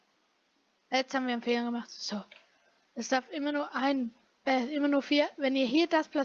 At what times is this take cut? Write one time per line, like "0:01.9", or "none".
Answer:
none